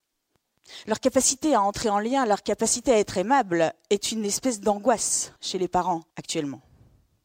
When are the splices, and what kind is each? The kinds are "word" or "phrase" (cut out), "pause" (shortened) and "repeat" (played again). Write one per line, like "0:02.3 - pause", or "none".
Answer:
0:05.4 - pause
0:06.1 - pause